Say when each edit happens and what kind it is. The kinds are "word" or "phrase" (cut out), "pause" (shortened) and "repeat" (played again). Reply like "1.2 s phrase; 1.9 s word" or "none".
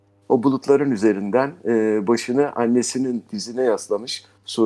none